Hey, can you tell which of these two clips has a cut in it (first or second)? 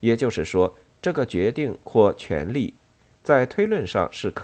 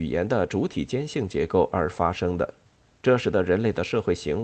second